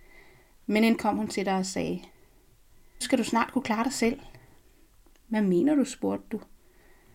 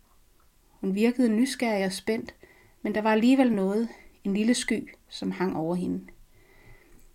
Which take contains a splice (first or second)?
first